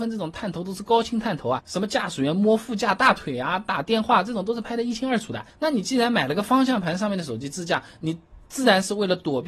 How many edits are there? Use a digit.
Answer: 1